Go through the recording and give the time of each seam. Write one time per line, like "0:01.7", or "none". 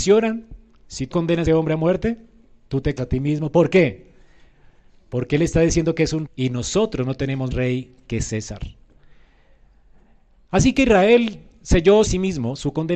0:01.1
0:01.5
0:03.0
0:06.3
0:07.5
0:12.1